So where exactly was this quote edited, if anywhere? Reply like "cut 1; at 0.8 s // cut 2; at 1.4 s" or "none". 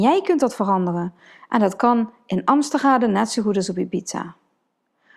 none